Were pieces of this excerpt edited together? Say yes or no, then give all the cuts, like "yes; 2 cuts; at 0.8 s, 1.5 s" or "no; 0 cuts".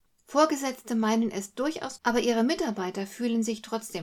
yes; 1 cut; at 2.0 s